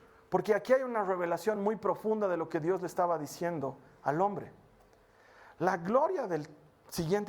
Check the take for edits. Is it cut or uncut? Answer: uncut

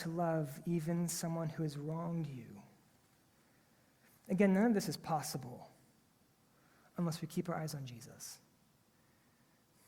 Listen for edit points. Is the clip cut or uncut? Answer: uncut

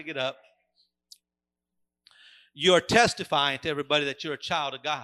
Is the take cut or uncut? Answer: uncut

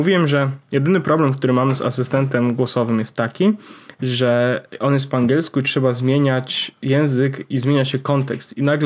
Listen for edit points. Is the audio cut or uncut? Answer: uncut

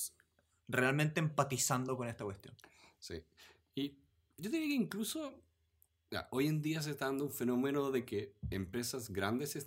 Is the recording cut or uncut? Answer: uncut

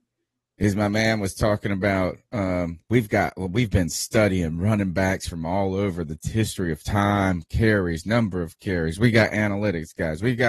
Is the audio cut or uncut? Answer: cut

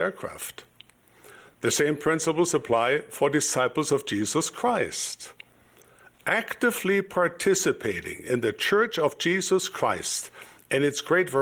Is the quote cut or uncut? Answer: uncut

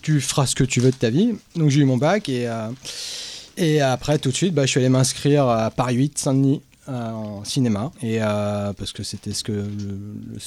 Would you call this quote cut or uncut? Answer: cut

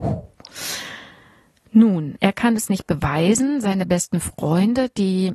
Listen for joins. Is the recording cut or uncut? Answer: uncut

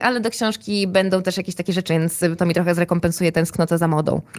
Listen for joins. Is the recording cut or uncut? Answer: cut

